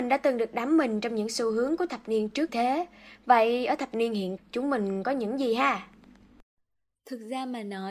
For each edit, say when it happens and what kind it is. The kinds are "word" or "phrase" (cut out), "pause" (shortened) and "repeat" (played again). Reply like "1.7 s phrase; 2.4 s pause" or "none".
2.5 s word; 4.4 s word